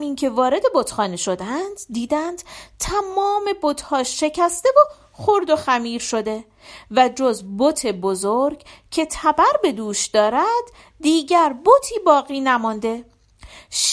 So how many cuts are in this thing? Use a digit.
0